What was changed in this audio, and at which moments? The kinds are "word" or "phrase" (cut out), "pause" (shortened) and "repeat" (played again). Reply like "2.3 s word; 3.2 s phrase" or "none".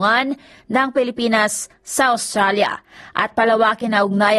none